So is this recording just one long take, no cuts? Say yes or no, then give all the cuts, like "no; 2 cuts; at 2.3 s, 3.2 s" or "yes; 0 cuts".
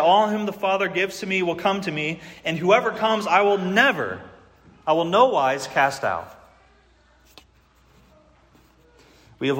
yes; 0 cuts